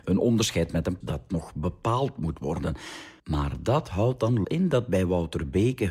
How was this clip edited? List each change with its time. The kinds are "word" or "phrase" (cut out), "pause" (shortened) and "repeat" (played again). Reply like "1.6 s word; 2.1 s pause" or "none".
1.0 s word; 3.2 s pause; 4.4 s phrase